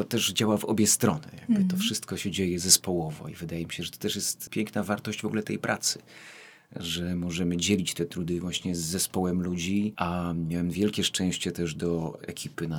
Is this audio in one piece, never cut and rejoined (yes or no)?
yes